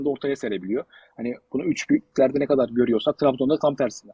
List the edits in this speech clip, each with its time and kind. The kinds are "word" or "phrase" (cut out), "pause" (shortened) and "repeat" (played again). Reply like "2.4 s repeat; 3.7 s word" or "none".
none

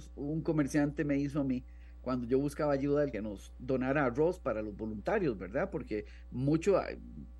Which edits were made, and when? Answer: 3.1 s phrase

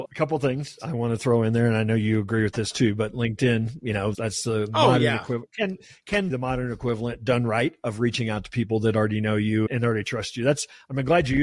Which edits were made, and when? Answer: 6.3 s word

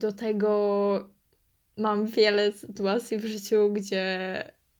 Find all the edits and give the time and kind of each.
none

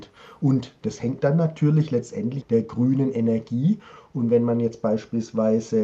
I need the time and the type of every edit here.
2.4 s phrase

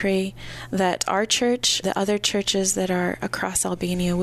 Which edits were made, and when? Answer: 1.8 s word

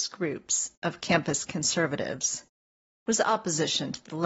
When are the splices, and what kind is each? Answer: none

